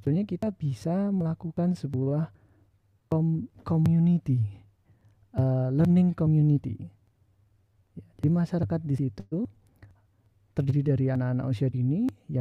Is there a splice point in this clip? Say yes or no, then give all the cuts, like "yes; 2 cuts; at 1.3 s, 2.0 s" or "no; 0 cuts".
no; 0 cuts